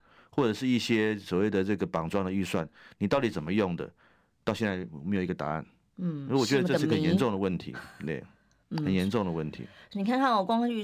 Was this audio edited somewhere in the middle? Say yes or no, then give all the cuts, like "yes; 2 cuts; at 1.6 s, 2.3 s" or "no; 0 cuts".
no; 0 cuts